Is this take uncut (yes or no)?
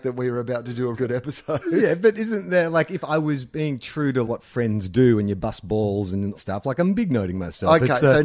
no